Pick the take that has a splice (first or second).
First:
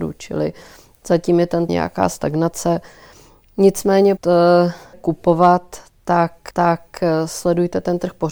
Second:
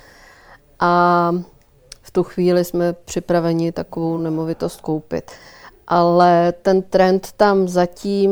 first